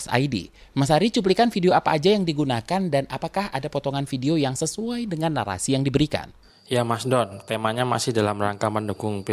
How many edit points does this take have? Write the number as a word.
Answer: zero